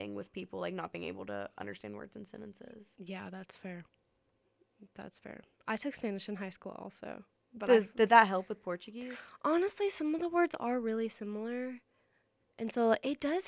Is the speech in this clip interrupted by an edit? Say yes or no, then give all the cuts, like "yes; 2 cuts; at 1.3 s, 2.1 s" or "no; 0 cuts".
no; 0 cuts